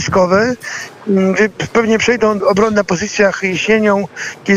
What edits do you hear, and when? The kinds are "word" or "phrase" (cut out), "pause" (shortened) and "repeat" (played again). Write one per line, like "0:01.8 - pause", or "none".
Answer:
0:02.4 - phrase